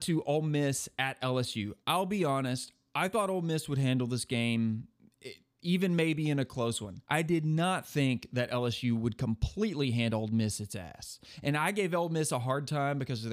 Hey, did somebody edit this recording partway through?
yes; 2 cuts; at 1.8 s, 7.0 s

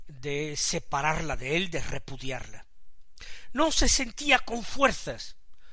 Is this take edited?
no; 0 cuts

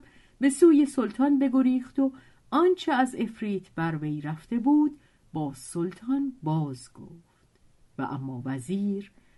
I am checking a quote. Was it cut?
no; 0 cuts

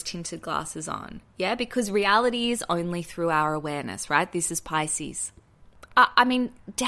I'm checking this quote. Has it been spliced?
no; 0 cuts

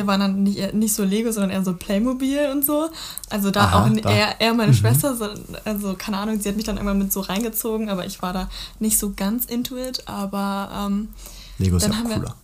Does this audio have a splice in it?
no; 0 cuts

